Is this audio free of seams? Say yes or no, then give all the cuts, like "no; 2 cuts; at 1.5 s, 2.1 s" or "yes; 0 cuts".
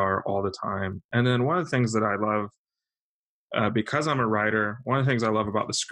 yes; 0 cuts